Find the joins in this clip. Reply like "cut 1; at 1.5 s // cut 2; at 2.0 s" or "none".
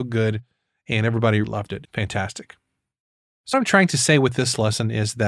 cut 1; at 1.4 s // cut 2; at 1.8 s // cut 3; at 3.5 s